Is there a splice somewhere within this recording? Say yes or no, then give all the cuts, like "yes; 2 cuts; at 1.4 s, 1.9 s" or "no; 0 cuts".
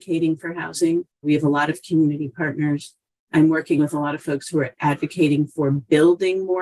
yes; 1 cut; at 1.1 s